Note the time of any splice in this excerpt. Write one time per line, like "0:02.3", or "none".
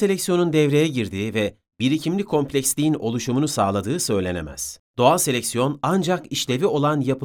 0:04.8